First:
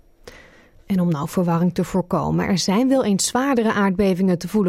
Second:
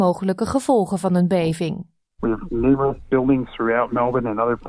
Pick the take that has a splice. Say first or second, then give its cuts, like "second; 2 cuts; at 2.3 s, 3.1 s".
second; 1 cut; at 3.0 s